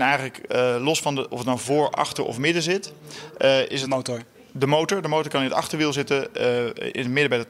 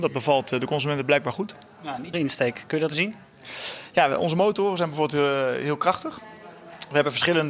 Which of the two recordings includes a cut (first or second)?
second